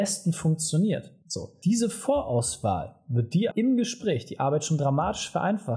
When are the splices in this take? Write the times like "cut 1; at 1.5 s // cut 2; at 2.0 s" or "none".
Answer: cut 1; at 3.5 s